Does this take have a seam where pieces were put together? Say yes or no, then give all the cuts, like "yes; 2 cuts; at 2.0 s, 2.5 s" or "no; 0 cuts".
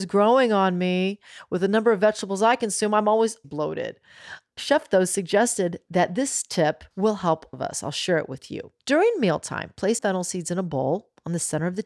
yes; 6 cuts; at 3.4 s, 4.6 s, 6.9 s, 7.5 s, 8.8 s, 10.0 s